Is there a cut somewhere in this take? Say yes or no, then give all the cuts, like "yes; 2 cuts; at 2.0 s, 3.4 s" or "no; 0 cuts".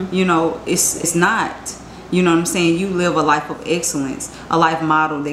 yes; 1 cut; at 1.0 s